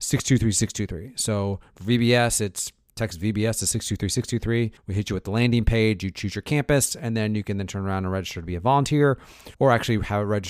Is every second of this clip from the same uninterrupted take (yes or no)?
no